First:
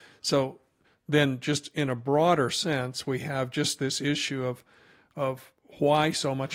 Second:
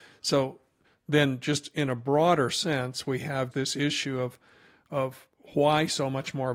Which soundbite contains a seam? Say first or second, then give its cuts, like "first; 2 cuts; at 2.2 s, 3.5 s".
second; 1 cut; at 3.5 s